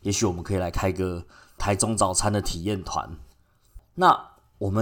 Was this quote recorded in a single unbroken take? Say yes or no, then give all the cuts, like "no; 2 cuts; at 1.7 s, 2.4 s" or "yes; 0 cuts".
yes; 0 cuts